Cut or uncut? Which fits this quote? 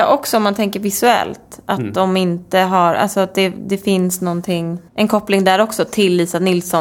cut